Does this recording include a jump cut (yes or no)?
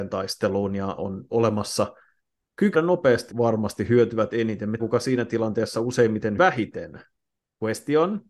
yes